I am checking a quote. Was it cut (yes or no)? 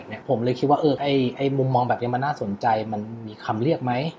no